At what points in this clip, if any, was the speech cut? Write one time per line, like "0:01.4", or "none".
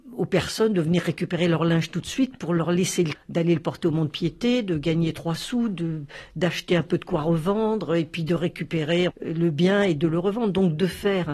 0:03.1
0:09.1